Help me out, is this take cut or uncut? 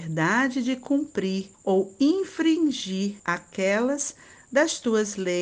cut